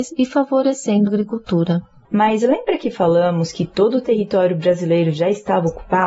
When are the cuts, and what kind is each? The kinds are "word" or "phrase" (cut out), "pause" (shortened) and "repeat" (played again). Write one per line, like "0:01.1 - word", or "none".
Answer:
0:01.1 - word